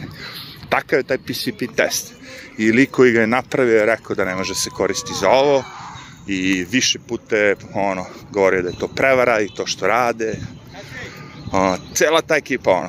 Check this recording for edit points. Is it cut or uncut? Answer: uncut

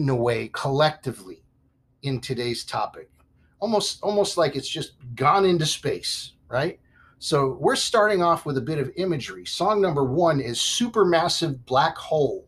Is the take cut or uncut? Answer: uncut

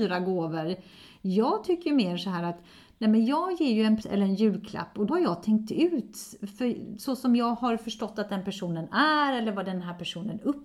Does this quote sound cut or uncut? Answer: cut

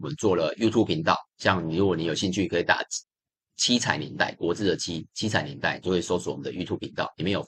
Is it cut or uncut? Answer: cut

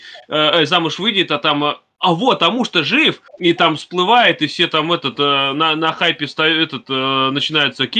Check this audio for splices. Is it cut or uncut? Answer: cut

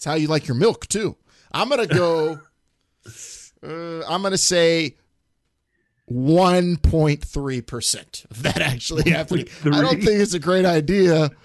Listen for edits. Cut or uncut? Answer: uncut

